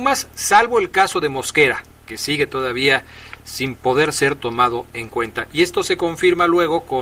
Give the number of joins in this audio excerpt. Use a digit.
0